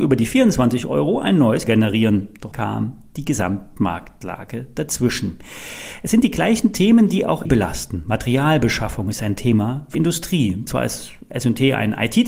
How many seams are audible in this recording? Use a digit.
4